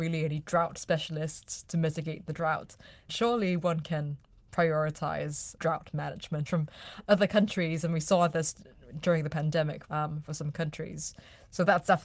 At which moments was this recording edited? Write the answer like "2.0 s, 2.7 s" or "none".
3.1 s, 5.6 s, 6.5 s, 9.9 s